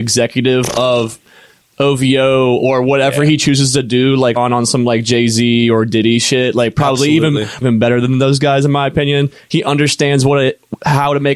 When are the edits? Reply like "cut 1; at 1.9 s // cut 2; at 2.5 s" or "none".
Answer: cut 1; at 4.4 s // cut 2; at 7.6 s